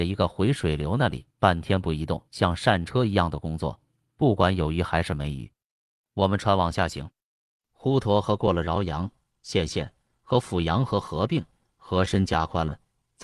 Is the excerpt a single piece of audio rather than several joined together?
no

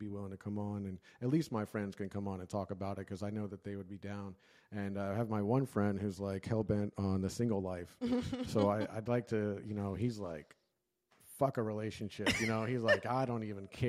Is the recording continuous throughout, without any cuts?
yes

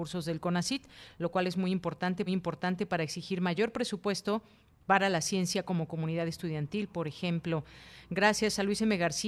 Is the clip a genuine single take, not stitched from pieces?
no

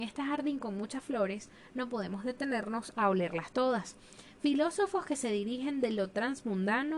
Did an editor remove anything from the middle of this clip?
no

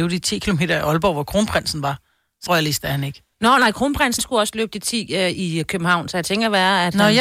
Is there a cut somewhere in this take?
yes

